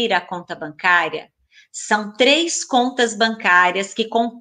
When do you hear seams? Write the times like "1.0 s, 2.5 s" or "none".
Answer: none